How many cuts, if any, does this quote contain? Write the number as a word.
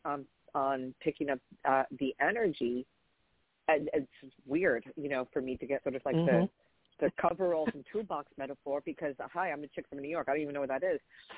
one